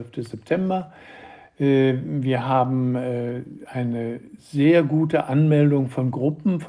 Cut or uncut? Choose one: uncut